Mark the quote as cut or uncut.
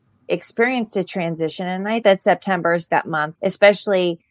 cut